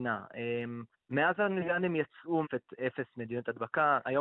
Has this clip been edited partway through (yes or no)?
yes